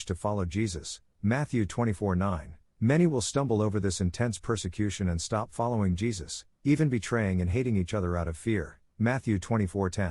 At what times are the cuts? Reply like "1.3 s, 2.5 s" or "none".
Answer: none